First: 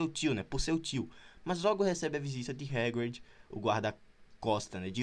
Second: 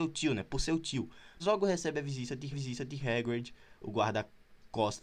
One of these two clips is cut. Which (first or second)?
second